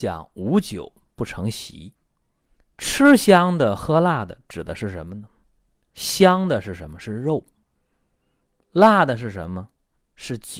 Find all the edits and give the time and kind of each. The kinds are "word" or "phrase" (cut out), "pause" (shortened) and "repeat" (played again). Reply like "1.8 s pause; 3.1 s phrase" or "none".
2.0 s pause